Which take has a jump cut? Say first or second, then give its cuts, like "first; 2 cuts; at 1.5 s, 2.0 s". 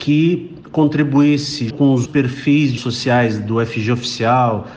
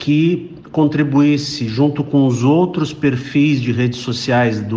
first; 3 cuts; at 1.7 s, 2.0 s, 2.8 s